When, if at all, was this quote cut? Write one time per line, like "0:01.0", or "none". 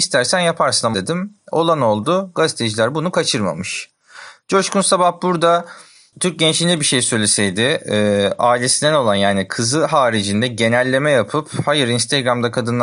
0:00.9